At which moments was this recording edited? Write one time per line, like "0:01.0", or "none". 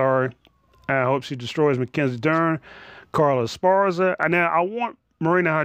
none